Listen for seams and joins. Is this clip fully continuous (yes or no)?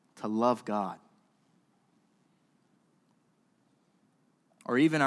yes